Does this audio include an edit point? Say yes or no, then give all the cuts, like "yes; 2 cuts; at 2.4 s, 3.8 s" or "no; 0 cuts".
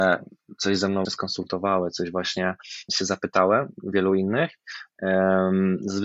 yes; 3 cuts; at 1.1 s, 2.9 s, 3.7 s